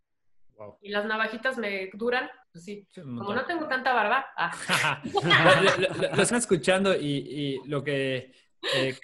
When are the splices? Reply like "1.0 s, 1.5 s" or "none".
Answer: 2.4 s, 6.3 s